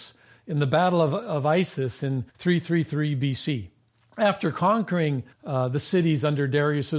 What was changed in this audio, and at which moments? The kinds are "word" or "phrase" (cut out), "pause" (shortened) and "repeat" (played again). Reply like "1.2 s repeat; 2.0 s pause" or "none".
2.3 s pause; 5.3 s pause